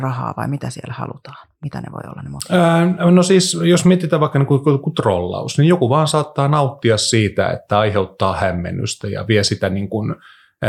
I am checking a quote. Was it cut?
no; 0 cuts

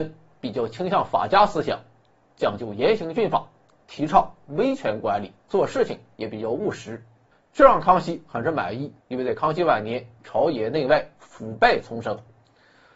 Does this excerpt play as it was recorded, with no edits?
no; 3 cuts; at 5.4 s, 7.3 s, 9.0 s

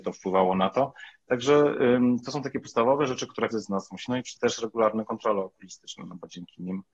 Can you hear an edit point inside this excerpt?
yes; 3 cuts; at 3.5 s, 4.1 s, 4.4 s

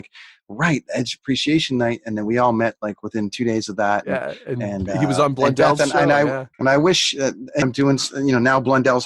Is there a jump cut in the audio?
yes; 2 cuts; at 6.5 s, 7.6 s

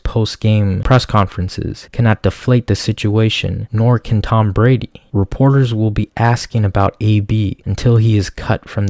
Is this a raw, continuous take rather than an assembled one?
yes; 0 cuts

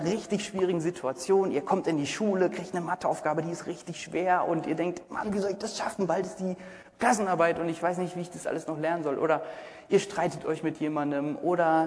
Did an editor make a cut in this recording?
no; 0 cuts

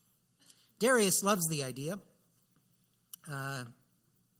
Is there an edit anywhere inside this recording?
no; 0 cuts

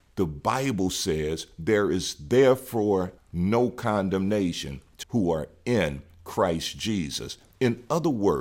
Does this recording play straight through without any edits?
no; 2 cuts; at 3.2 s, 5.0 s

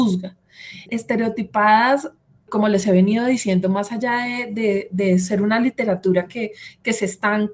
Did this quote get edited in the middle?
no; 0 cuts

